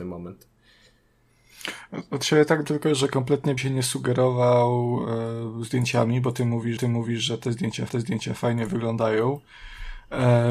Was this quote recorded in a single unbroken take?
no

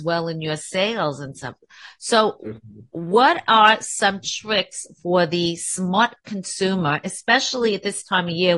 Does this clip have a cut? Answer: no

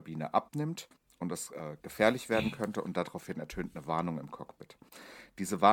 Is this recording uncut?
yes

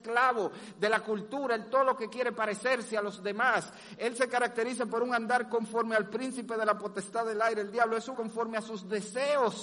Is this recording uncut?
no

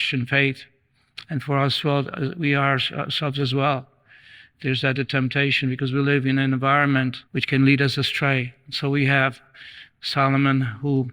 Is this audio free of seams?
no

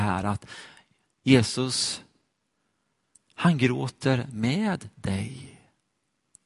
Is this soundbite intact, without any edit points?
yes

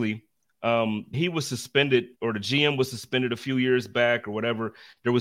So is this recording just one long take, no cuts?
no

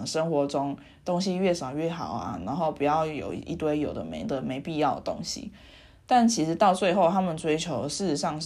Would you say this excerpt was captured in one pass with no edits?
yes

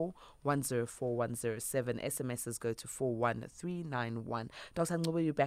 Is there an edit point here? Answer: no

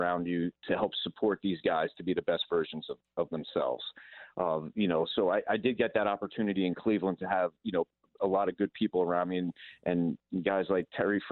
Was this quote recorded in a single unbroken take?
yes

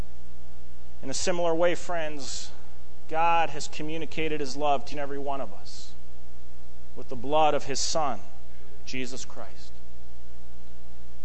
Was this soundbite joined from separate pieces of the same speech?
yes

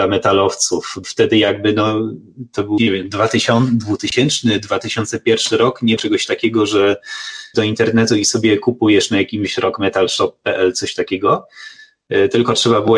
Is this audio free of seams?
no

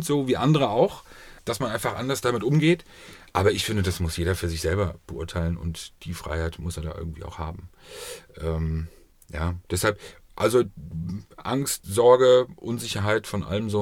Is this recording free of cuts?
no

